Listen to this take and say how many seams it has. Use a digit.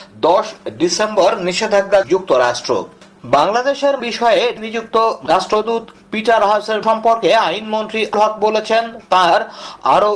6